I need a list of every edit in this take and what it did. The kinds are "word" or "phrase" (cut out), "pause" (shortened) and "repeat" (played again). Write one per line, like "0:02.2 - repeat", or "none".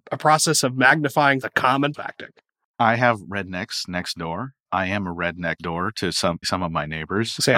0:01.4 - word
0:01.9 - word
0:04.7 - word
0:05.6 - word
0:06.4 - word